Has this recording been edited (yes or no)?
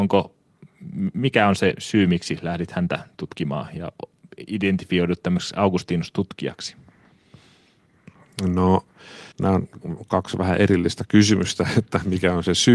yes